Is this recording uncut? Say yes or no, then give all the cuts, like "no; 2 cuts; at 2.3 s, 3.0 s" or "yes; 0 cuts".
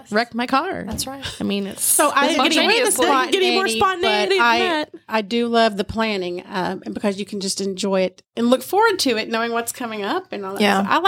yes; 0 cuts